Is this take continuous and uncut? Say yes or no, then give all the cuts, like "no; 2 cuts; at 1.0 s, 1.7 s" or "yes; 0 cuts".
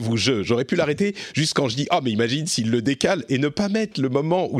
yes; 0 cuts